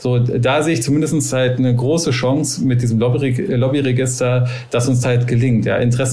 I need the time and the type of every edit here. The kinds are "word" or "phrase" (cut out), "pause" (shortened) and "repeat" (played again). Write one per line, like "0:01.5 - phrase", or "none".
0:05.0 - word